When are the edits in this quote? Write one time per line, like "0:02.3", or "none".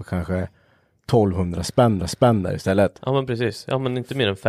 0:02.0